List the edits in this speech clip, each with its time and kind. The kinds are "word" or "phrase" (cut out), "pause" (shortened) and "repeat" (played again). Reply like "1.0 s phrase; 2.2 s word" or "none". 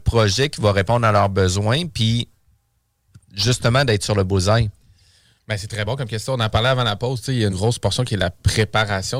7.5 s word